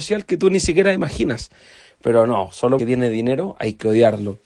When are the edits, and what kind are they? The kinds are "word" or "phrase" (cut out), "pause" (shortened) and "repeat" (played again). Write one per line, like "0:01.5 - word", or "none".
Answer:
0:02.8 - word